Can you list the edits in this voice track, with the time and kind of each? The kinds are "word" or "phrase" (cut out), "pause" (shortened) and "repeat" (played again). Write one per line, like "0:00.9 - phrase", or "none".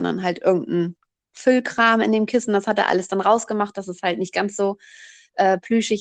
none

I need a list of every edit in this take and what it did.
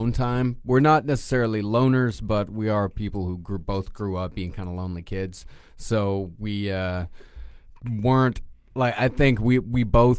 0:07.8 - word

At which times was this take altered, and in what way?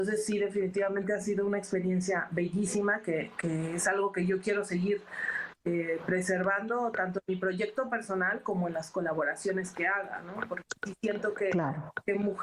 none

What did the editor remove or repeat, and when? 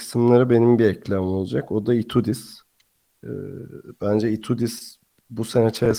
none

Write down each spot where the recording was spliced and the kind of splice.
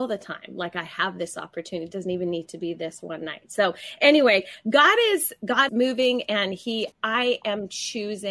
0:05.7 - word
0:06.9 - pause

